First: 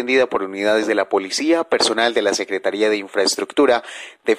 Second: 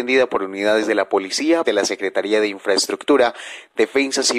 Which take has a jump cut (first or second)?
second